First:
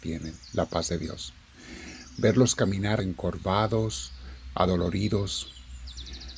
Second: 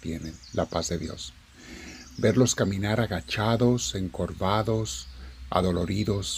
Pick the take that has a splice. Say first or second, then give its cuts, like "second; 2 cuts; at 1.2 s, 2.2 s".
first; 1 cut; at 3.0 s